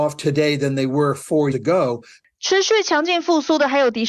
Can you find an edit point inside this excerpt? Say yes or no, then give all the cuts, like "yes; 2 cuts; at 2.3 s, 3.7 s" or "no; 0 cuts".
yes; 1 cut; at 1.5 s